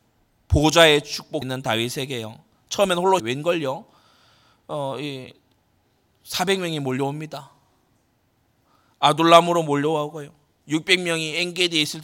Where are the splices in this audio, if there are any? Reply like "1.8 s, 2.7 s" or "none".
1.4 s, 3.2 s